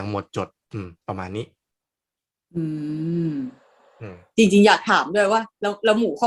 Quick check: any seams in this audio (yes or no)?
yes